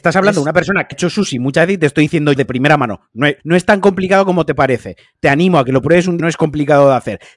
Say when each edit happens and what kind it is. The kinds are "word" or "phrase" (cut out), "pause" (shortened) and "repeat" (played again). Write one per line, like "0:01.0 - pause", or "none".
0:00.9 - word
0:02.4 - word
0:03.4 - pause
0:06.2 - phrase